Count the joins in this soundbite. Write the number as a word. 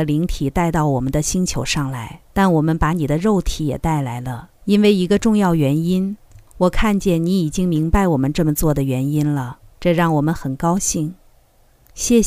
four